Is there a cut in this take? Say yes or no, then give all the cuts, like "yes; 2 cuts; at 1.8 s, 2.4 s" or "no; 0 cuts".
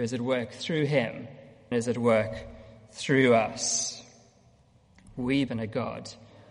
yes; 2 cuts; at 1.7 s, 5.5 s